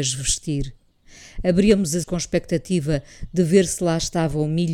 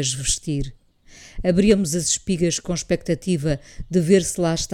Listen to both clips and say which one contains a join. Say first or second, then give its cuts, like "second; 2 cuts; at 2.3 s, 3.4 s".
first; 1 cut; at 2.0 s